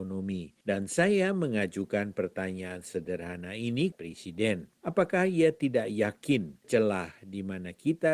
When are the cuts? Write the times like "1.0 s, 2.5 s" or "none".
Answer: 3.9 s, 4.8 s, 6.6 s